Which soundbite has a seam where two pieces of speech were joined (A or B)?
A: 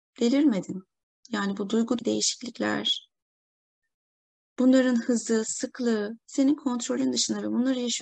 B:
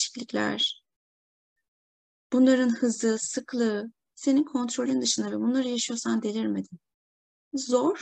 A